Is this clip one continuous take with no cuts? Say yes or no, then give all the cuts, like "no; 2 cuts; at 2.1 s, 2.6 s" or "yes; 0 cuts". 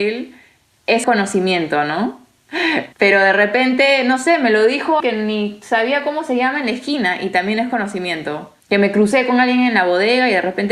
no; 4 cuts; at 1.0 s, 2.9 s, 5.0 s, 8.6 s